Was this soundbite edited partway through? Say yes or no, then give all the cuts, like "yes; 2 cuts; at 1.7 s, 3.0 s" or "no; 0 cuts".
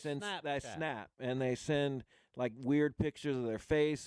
no; 0 cuts